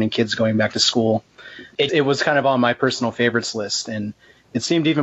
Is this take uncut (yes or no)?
no